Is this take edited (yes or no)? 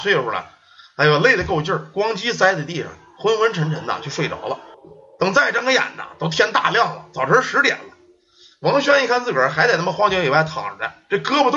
yes